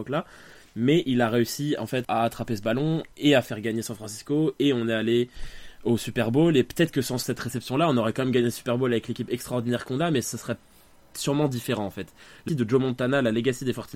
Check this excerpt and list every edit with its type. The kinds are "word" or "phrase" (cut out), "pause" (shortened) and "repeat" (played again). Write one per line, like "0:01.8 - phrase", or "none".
0:02.0 - word
0:03.1 - pause
0:12.5 - word